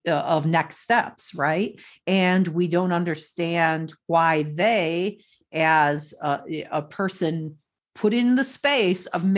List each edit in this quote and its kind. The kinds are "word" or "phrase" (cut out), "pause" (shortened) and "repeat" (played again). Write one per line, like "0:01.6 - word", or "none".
none